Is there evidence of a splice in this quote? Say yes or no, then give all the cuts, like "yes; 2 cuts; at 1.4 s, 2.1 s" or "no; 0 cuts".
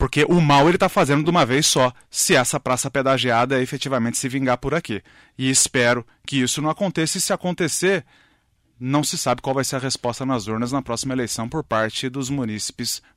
no; 0 cuts